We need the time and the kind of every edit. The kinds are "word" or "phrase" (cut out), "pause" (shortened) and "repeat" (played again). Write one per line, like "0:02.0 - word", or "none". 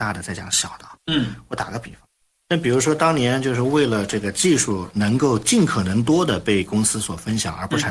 0:02.2 - pause